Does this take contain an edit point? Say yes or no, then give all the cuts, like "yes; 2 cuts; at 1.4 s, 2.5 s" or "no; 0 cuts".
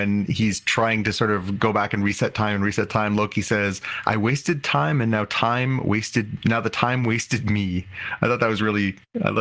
no; 0 cuts